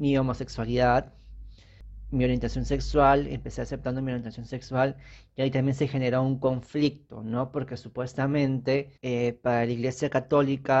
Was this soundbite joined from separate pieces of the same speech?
yes; 1 cut; at 9.0 s

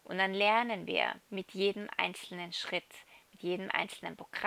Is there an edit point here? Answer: yes; 1 cut; at 1.2 s

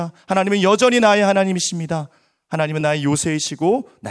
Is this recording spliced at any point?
no; 0 cuts

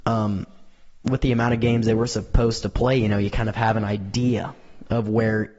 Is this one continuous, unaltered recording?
yes; 0 cuts

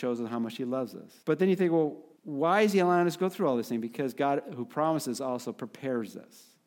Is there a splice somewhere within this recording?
yes; 2 cuts; at 1.2 s, 2.2 s

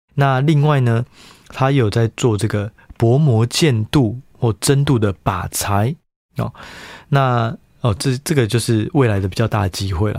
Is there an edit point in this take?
no; 0 cuts

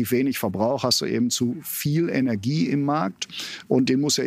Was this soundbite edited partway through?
no; 0 cuts

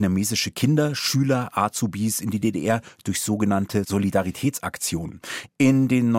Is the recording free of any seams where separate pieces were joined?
yes; 0 cuts

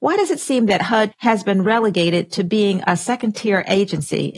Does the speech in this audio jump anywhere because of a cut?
yes; 1 cut; at 1.1 s

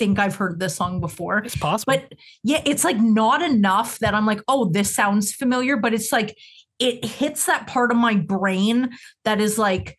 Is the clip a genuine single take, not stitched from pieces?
yes; 0 cuts

